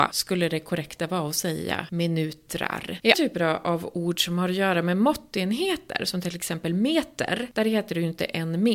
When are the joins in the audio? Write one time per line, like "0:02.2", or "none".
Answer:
0:03.1